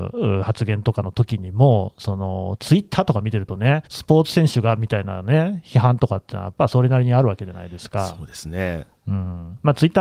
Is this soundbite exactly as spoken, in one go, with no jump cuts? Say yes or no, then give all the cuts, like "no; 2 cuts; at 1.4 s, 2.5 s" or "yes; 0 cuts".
no; 1 cut; at 3.9 s